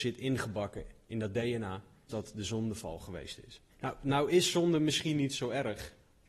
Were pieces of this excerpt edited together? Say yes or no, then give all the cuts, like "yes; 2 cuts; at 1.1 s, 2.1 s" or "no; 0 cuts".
yes; 2 cuts; at 2.1 s, 3.7 s